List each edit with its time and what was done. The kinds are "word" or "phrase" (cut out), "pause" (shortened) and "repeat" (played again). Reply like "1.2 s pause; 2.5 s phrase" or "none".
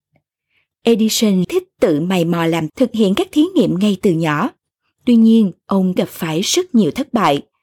1.4 s word; 2.7 s word; 6.0 s word